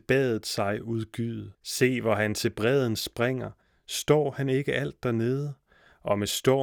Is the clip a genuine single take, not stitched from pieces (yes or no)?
no